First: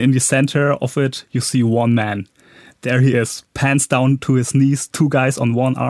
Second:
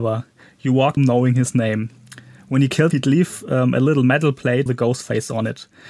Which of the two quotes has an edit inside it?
second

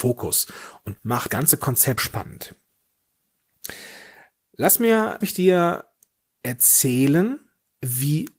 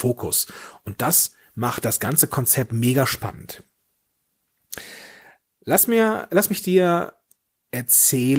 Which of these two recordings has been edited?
first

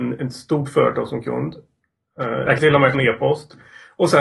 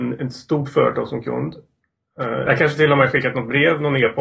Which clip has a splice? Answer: first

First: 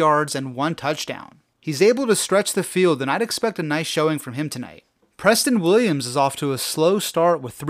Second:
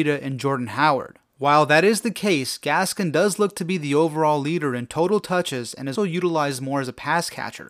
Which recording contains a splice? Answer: second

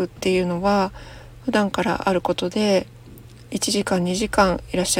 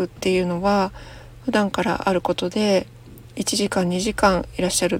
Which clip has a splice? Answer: second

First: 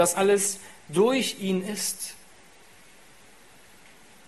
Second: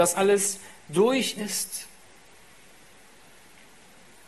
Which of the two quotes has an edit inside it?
second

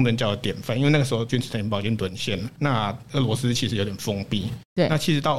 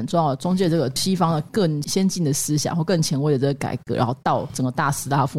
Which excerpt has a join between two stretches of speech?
first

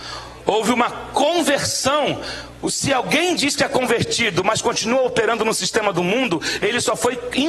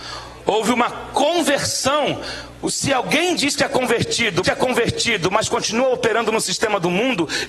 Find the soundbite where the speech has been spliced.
second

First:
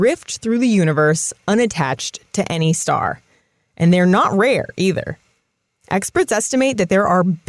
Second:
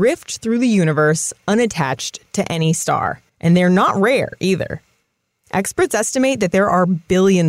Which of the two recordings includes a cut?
second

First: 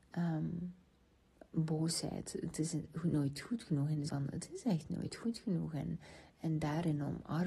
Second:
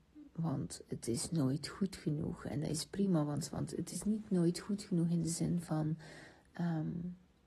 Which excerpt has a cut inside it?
first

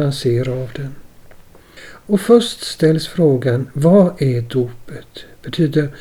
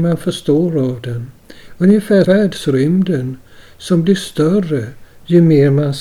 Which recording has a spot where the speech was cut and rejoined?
second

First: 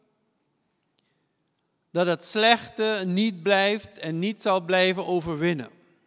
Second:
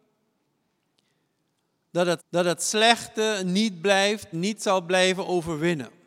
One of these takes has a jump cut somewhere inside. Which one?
second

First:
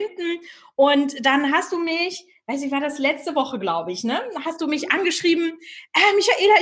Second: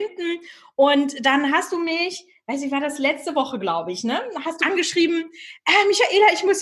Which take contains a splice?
second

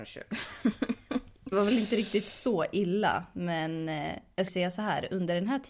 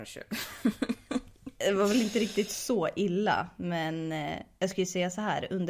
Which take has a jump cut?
first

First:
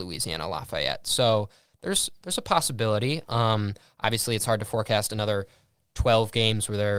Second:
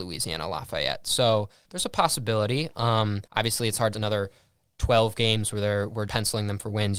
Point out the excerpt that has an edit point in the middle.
second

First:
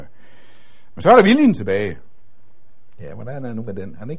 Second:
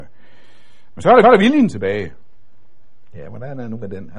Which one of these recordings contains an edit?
second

